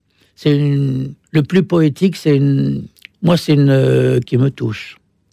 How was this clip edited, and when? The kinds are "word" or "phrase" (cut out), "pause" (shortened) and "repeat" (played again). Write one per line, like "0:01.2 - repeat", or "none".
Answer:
0:01.2 - pause
0:02.9 - pause
0:04.3 - word